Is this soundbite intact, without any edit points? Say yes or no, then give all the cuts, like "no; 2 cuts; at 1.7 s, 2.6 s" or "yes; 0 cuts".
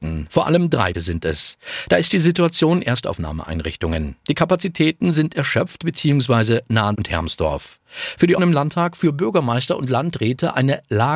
no; 4 cuts; at 0.9 s, 2.8 s, 6.9 s, 8.4 s